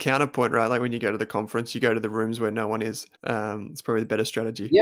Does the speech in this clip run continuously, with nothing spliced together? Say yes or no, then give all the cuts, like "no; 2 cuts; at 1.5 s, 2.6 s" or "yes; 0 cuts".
no; 1 cut; at 3.1 s